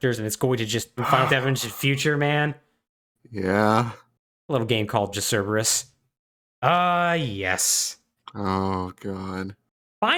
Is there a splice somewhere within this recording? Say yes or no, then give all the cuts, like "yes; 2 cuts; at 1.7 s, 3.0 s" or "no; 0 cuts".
yes; 3 cuts; at 1.0 s, 1.3 s, 5.1 s